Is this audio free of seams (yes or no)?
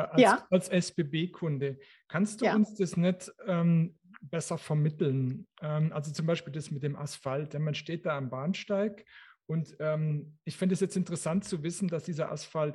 yes